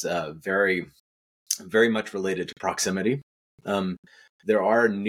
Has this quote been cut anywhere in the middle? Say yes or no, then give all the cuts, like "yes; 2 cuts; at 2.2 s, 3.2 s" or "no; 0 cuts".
no; 0 cuts